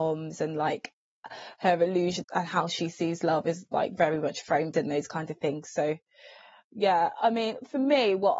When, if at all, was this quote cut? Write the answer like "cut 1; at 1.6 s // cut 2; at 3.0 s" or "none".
cut 1; at 2.2 s